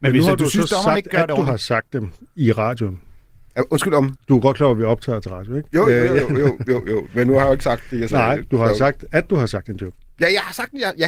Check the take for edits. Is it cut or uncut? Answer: uncut